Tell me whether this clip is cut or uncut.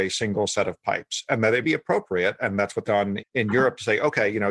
cut